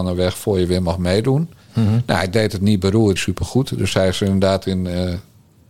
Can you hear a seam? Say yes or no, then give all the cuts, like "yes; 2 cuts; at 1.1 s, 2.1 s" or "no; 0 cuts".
yes; 1 cut; at 3.2 s